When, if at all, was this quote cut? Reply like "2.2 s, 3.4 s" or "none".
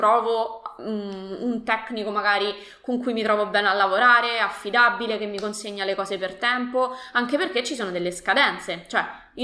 none